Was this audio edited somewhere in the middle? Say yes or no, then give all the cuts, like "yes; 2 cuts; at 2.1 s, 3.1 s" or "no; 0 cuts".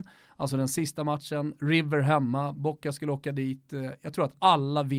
no; 0 cuts